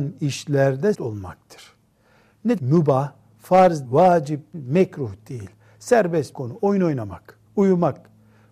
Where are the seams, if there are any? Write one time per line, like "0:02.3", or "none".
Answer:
0:00.9
0:02.6
0:03.8
0:04.5
0:06.3
0:07.5